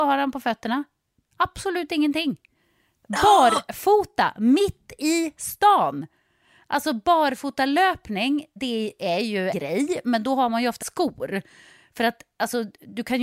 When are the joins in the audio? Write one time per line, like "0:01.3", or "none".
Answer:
0:08.6
0:09.5
0:10.8

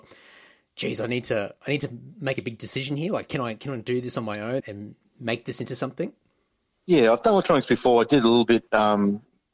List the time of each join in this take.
0:04.6

